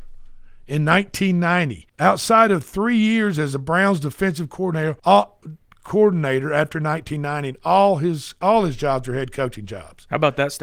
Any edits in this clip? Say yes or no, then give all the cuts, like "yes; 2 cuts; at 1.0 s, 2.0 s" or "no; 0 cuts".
yes; 2 cuts; at 1.9 s, 5.0 s